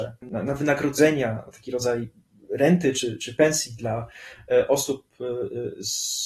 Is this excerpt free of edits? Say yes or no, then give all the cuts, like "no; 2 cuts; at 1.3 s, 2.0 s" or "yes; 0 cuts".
yes; 0 cuts